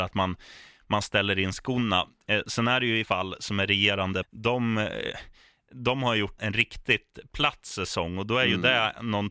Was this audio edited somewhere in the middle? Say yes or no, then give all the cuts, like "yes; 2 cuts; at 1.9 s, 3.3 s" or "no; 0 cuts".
yes; 3 cuts; at 3.1 s, 4.2 s, 6.4 s